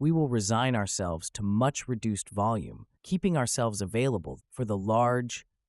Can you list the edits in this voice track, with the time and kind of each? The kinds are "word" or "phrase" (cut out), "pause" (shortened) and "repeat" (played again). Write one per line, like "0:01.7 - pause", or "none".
0:03.0 - pause
0:04.4 - word